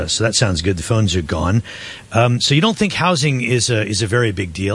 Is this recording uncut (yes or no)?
yes